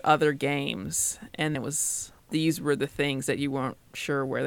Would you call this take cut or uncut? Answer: cut